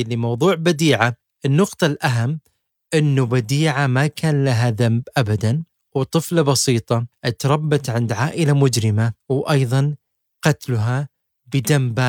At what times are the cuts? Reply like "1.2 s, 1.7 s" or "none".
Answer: 10.3 s